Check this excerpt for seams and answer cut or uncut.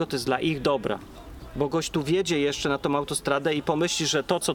uncut